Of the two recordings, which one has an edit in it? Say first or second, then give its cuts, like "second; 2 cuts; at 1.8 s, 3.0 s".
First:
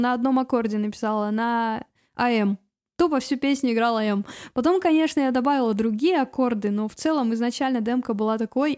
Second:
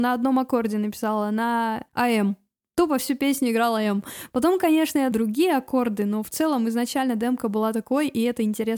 second; 2 cuts; at 1.9 s, 5.1 s